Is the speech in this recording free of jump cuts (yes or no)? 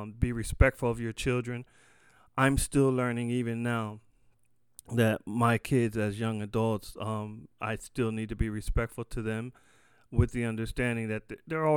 yes